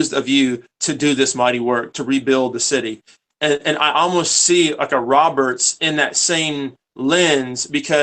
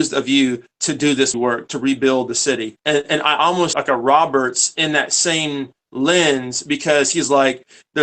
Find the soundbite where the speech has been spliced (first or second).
second